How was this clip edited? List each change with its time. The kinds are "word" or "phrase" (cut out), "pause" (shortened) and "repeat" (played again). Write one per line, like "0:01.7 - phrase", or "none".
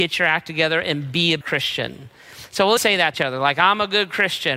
0:01.4 - word
0:02.8 - word
0:03.1 - phrase